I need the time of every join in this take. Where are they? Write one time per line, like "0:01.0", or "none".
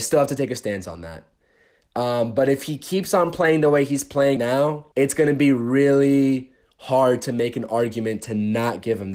0:04.4
0:04.9

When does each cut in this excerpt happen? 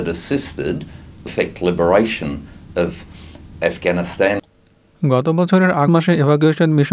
0:01.3
0:05.9

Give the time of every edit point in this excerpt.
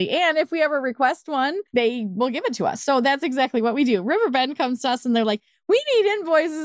0:01.7

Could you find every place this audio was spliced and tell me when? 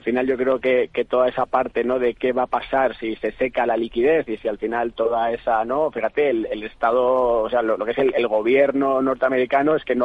none

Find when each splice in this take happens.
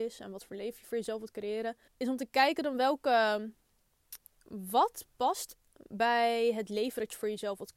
0:01.9

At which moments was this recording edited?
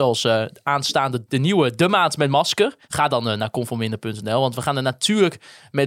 0:01.3
0:02.8

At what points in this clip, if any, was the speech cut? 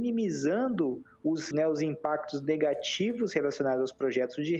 0:01.5

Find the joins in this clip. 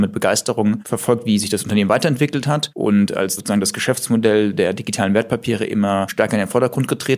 0:03.4

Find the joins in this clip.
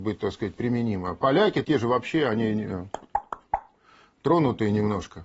0:01.6

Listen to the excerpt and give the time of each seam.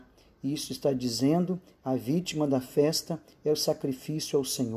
none

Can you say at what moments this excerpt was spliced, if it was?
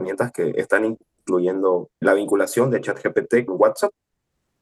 0:02.0
0:03.5

